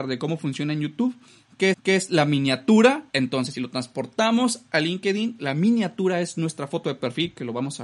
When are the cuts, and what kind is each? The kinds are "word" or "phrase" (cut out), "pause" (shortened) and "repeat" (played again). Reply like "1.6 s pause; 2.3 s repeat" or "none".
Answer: 1.7 s repeat; 3.1 s pause